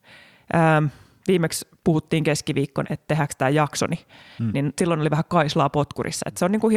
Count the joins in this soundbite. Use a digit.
1